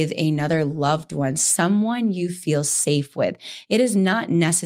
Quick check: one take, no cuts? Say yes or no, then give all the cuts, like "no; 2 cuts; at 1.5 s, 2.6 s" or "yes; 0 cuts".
yes; 0 cuts